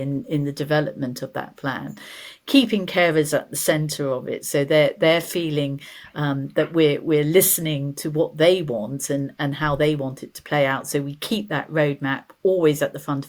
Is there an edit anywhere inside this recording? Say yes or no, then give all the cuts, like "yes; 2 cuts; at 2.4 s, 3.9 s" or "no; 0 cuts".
no; 0 cuts